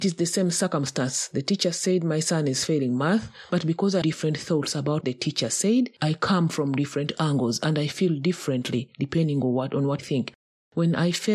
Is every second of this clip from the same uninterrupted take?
no; 3 cuts; at 4.0 s, 5.0 s, 10.0 s

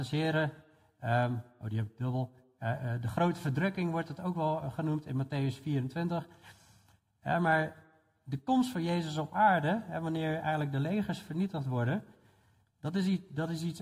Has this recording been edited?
no; 0 cuts

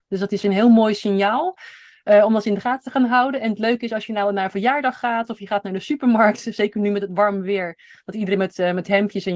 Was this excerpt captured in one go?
yes; 0 cuts

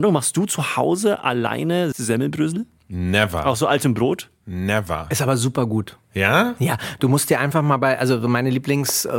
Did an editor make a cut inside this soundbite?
yes; 1 cut; at 1.9 s

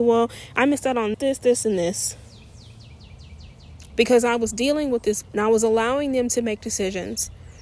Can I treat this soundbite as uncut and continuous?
no; 3 cuts; at 1.1 s, 1.6 s, 5.2 s

